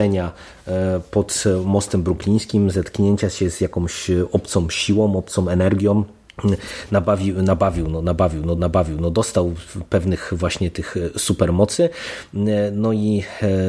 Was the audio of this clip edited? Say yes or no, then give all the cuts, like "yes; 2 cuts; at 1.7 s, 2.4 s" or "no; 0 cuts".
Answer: yes; 1 cut; at 8.6 s